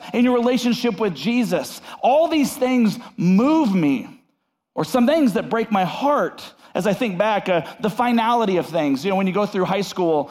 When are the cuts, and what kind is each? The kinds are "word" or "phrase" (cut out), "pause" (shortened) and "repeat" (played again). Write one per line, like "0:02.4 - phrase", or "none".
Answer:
none